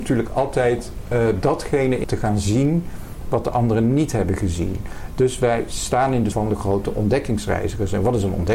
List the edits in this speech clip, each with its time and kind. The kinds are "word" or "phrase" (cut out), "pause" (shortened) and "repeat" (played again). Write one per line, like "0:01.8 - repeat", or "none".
0:02.0 - phrase
0:06.3 - word